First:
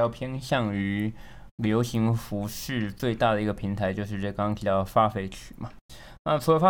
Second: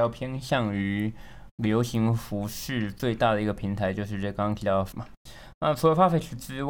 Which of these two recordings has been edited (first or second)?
second